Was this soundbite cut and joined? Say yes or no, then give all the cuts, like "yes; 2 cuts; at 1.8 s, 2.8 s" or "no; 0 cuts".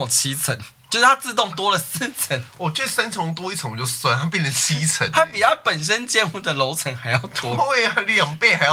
no; 0 cuts